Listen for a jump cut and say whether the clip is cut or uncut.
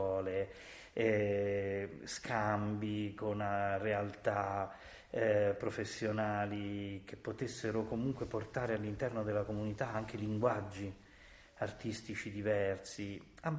uncut